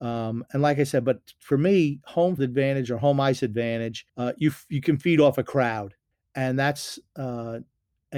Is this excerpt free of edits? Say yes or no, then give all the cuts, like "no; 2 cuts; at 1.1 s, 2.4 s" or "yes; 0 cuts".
no; 3 cuts; at 2.4 s, 4.1 s, 6.1 s